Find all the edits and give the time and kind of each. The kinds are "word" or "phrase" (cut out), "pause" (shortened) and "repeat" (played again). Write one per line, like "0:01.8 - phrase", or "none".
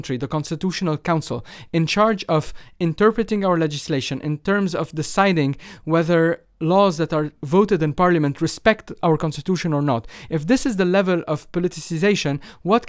none